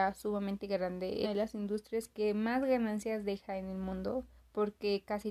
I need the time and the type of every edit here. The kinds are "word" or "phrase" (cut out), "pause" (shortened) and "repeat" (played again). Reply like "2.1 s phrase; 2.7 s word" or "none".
1.2 s phrase; 4.4 s pause